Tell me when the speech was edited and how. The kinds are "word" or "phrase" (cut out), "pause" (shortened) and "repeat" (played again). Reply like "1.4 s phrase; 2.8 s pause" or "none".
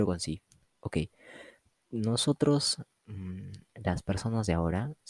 none